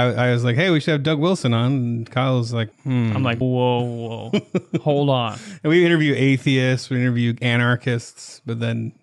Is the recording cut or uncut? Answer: cut